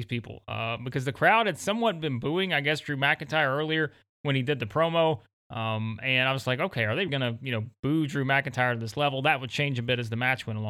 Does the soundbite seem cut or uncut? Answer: cut